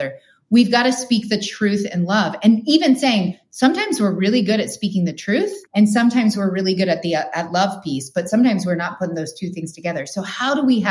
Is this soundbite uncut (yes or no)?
no